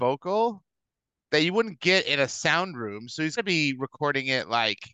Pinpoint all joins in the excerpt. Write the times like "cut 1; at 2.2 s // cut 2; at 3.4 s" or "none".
cut 1; at 3.4 s